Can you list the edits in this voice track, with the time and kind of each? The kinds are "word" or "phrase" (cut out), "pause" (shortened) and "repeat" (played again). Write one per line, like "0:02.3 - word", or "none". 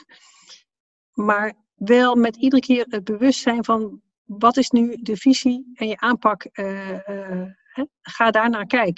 none

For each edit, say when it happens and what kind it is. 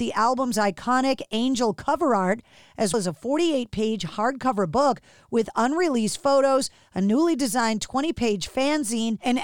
0:02.9 - word

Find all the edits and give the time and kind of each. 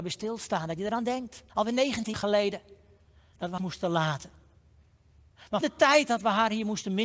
0:01.5 - pause
0:02.1 - word
0:03.6 - word
0:05.6 - word

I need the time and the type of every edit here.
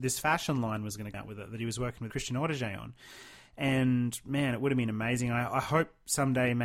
0:01.1 - word

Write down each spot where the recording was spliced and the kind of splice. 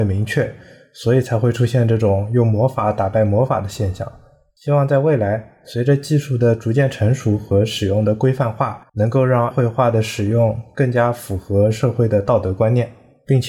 0:08.9 - pause
0:09.5 - word

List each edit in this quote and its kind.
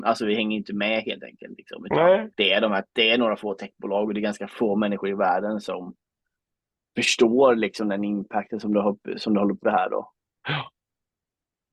0:02.3 - pause
0:09.6 - phrase

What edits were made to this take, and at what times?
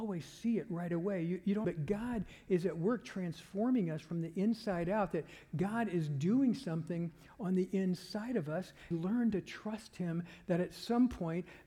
0:01.6 - phrase
0:08.9 - phrase

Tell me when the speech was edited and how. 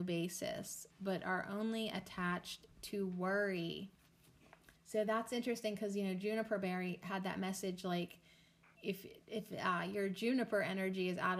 0:00.9 - pause
0:04.8 - pause
0:08.8 - phrase

